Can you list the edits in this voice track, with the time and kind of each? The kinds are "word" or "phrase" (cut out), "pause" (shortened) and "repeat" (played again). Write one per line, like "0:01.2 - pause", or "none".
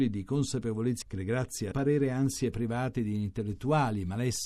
0:01.0 - word
0:01.7 - phrase

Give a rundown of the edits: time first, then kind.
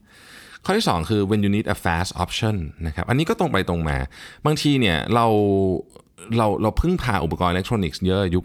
none

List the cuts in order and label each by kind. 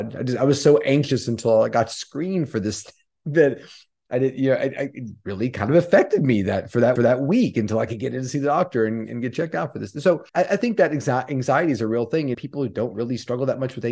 0:07.0 - repeat
0:10.3 - pause
0:12.3 - word

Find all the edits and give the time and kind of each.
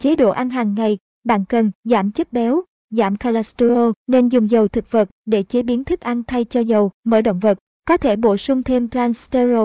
0:01.8 - pause
0:04.0 - pause
0:06.9 - pause

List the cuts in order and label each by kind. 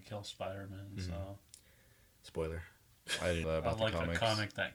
0:03.4 - word

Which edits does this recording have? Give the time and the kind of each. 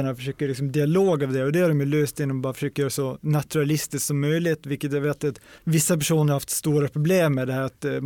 0:05.6 - pause

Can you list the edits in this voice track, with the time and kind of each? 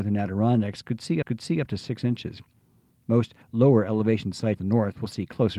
0:01.2 - repeat
0:03.4 - pause
0:04.6 - word

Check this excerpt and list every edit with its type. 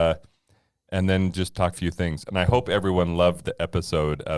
0:01.7 - phrase

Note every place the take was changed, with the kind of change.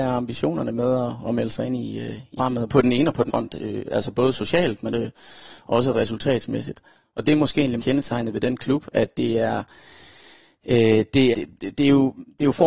0:02.4 - word
0:02.7 - word
0:03.3 - word
0:04.9 - word
0:07.8 - word
0:11.3 - word

